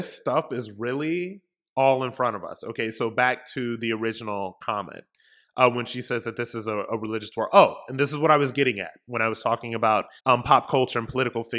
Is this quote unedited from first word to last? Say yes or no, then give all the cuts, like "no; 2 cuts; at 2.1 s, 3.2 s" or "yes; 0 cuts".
no; 1 cut; at 10.2 s